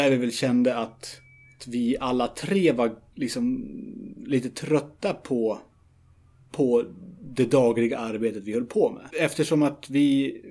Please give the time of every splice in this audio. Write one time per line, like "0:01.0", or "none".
0:09.1